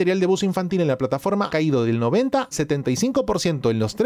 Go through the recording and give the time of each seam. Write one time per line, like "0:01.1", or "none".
0:01.5
0:02.5